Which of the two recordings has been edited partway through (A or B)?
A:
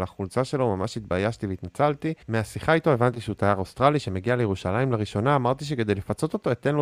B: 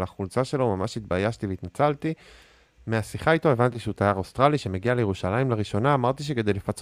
A